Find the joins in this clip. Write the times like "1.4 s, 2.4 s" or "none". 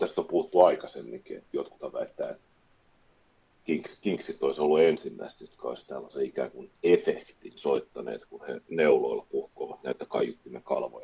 7.6 s